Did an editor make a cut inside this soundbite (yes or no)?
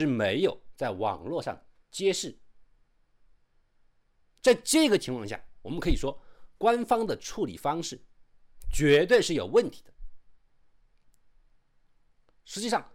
no